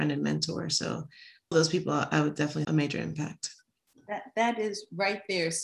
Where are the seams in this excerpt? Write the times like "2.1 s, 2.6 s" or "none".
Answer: 1.5 s, 2.6 s